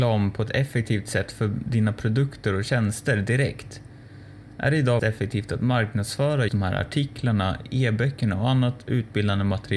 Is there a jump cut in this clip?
yes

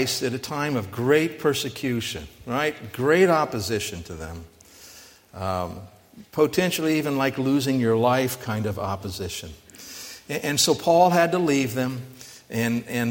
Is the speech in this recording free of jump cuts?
yes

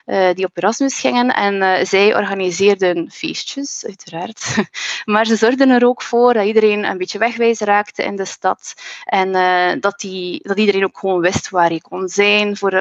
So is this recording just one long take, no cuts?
yes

